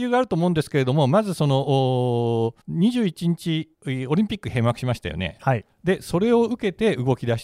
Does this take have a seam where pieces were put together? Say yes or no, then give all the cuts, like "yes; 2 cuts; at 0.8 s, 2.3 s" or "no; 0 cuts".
yes; 2 cuts; at 2.6 s, 3.7 s